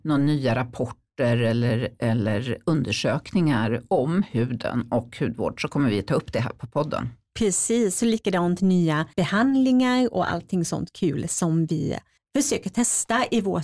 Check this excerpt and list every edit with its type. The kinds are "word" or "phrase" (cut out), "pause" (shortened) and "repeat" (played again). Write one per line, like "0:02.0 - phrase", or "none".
0:09.1 - pause
0:12.2 - pause